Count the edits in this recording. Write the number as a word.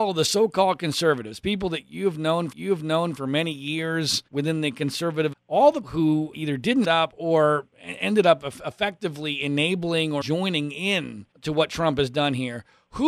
nine